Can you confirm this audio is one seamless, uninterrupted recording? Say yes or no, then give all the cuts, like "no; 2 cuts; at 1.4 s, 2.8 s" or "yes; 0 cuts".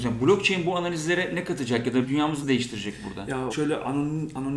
no; 3 cuts; at 2.0 s, 2.4 s, 3.5 s